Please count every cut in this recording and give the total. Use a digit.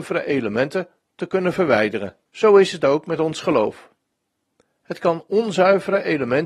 1